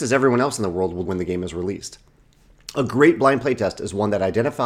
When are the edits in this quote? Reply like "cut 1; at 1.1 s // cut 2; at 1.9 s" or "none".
cut 1; at 1.1 s